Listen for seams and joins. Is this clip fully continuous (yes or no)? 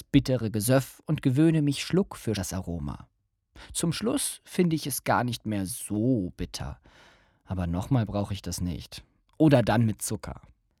no